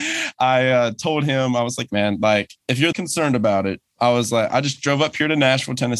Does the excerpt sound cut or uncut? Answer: cut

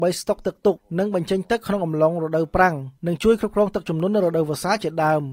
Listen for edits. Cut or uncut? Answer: cut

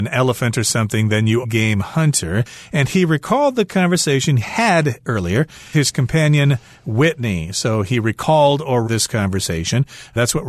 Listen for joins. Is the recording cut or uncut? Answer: cut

